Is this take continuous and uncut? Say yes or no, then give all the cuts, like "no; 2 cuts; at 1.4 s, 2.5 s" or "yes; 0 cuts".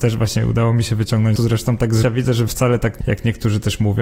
no; 4 cuts; at 1.4 s, 2.0 s, 2.5 s, 3.0 s